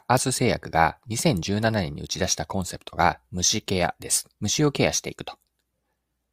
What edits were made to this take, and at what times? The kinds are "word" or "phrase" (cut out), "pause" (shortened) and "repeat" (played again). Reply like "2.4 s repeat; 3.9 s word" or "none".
4.4 s pause